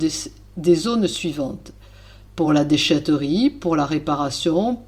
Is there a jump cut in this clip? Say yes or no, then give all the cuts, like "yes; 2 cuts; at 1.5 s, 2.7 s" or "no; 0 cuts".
no; 0 cuts